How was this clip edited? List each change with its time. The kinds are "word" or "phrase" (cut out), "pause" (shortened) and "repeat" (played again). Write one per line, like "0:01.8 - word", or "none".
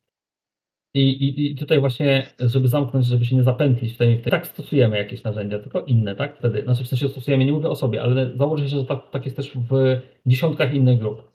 0:04.3 - phrase